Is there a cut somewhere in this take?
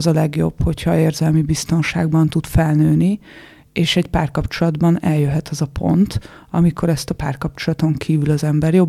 no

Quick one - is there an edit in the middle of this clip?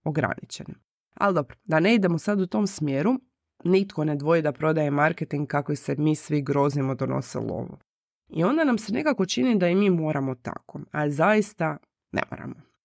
no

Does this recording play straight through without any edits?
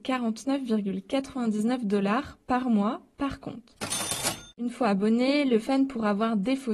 no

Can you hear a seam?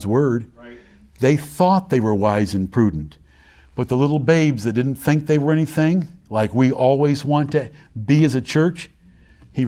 no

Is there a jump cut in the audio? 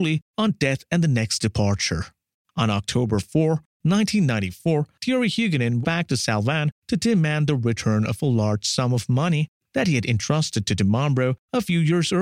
yes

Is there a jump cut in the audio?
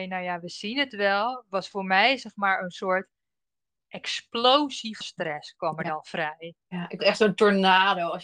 yes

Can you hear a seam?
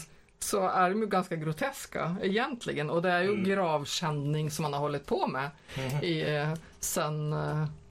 no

